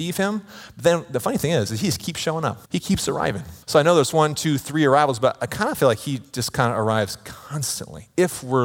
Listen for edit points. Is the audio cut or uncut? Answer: cut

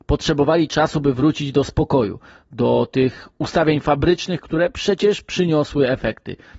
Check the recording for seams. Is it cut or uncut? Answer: uncut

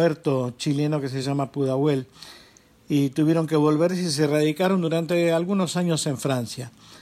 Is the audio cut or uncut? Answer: uncut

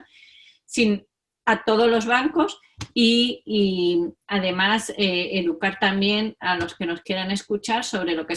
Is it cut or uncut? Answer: uncut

